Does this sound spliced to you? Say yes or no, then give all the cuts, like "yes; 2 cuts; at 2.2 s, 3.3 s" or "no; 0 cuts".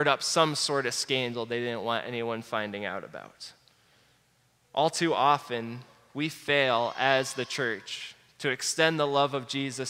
no; 0 cuts